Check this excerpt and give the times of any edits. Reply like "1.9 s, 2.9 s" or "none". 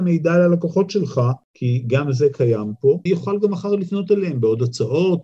3.1 s